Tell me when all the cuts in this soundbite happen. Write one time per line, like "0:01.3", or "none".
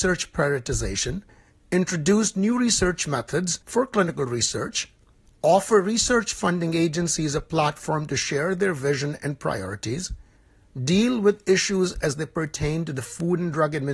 none